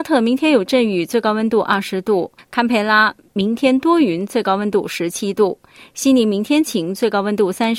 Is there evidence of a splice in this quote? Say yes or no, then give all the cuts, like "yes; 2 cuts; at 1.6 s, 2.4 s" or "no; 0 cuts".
no; 0 cuts